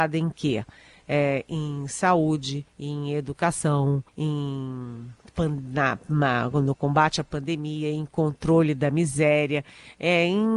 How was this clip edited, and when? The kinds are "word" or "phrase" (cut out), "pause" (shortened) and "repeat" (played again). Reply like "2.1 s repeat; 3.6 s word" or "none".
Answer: 2.7 s pause; 4.1 s pause